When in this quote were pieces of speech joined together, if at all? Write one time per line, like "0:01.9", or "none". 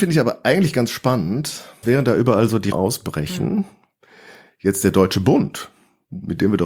0:01.8
0:02.7

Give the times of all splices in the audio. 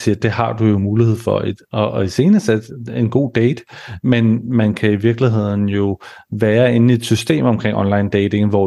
none

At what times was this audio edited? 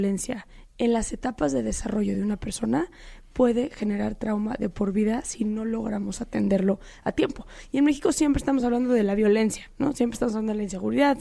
none

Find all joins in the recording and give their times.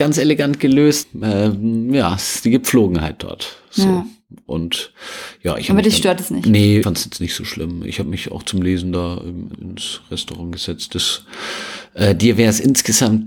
0:01.0
0:06.8
0:09.6

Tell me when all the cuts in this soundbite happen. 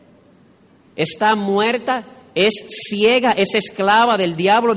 none

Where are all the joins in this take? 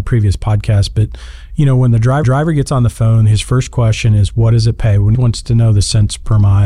0:02.2
0:05.2

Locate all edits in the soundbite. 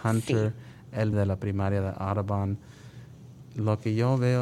0:01.1

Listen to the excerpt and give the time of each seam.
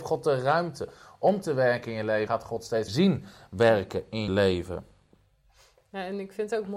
0:02.3
0:02.9
0:04.3

